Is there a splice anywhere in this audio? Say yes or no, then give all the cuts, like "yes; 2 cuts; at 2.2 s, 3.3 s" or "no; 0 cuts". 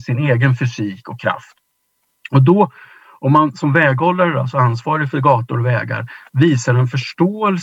no; 0 cuts